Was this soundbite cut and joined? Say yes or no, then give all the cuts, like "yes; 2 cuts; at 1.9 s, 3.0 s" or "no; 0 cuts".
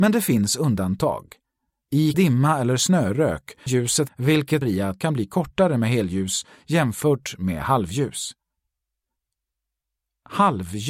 yes; 5 cuts; at 2.1 s, 3.7 s, 4.1 s, 4.6 s, 5.0 s